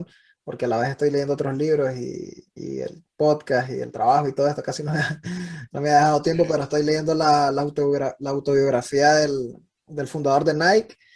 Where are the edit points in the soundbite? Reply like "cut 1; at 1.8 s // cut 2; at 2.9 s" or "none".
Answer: none